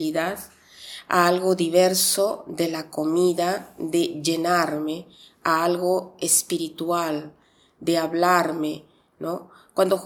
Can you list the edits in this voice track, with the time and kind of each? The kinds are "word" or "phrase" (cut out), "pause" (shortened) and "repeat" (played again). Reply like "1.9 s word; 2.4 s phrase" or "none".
none